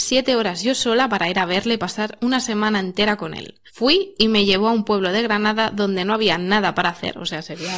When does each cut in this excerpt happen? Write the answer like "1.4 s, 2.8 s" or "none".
3.7 s